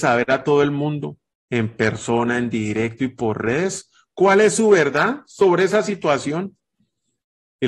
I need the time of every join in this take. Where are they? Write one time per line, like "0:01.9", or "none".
none